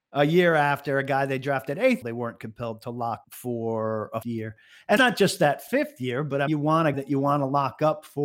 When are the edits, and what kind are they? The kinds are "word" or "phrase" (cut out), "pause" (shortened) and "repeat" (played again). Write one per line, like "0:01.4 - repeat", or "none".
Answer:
0:02.0 - word
0:03.2 - word
0:04.2 - word
0:05.0 - word
0:06.5 - word
0:06.9 - word